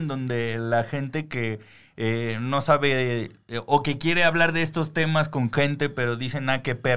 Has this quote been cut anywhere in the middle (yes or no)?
no